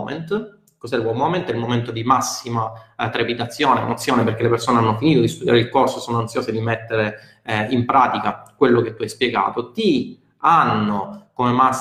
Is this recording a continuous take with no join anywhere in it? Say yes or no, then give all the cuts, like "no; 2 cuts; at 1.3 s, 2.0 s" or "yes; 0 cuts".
yes; 0 cuts